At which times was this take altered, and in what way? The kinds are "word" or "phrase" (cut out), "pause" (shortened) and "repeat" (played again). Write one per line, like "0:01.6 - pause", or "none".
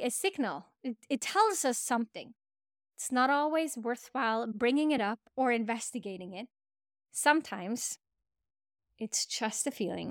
none